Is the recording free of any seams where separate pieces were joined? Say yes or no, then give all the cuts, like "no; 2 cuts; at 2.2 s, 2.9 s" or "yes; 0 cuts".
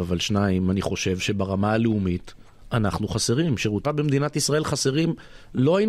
no; 1 cut; at 3.8 s